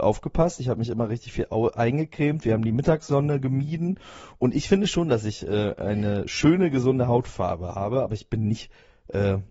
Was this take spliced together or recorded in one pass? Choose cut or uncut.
uncut